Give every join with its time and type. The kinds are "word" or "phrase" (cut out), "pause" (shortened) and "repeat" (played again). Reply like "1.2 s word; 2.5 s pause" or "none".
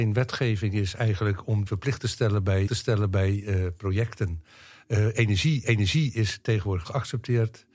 1.7 s word; 2.7 s repeat; 5.6 s repeat; 6.8 s word